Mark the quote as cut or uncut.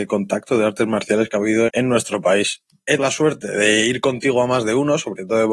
cut